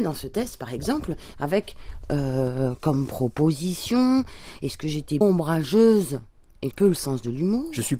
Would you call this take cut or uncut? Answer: cut